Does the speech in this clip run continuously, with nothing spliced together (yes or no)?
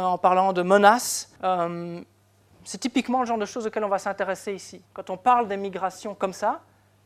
no